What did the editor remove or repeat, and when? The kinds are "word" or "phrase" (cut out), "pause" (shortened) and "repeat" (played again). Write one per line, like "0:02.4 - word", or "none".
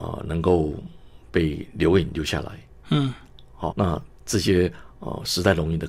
0:03.7 - word